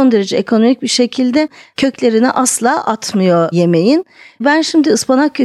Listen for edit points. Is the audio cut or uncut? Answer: uncut